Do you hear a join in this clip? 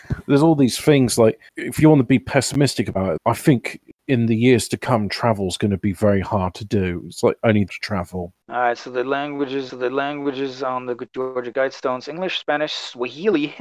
yes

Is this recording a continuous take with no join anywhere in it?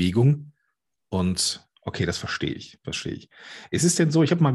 yes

